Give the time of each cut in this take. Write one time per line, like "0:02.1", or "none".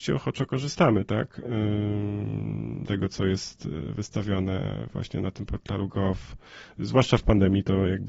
0:02.8